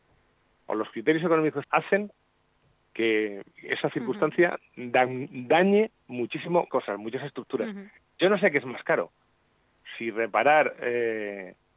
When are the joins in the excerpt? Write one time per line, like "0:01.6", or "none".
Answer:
0:01.6
0:03.5
0:06.7